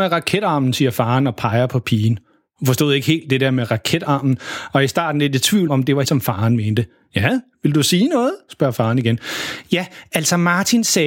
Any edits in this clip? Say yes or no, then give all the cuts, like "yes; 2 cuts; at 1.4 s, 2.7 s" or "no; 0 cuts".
yes; 2 cuts; at 5.7 s, 6.0 s